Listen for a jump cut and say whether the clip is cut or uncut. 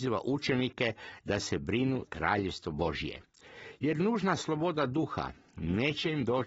cut